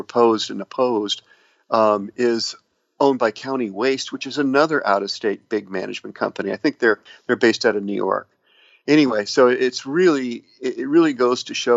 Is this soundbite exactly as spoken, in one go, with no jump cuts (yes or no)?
yes